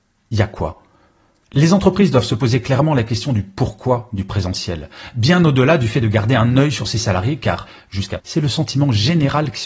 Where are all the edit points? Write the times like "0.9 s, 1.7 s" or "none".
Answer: 8.2 s